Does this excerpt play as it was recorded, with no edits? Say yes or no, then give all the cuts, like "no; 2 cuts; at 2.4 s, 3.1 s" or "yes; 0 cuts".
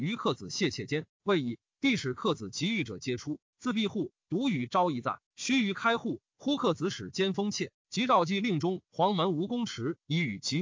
no; 1 cut; at 5.3 s